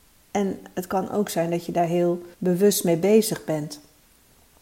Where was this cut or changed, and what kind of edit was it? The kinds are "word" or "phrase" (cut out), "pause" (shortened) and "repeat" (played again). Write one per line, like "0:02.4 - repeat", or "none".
0:02.3 - pause